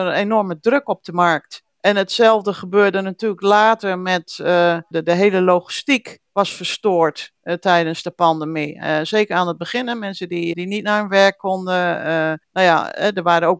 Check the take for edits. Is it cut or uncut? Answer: cut